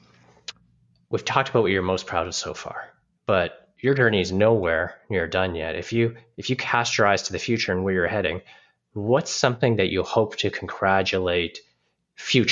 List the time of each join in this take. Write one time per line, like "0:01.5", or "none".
none